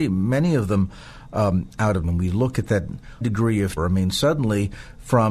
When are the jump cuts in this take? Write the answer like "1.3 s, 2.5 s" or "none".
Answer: 2.0 s, 3.2 s, 3.8 s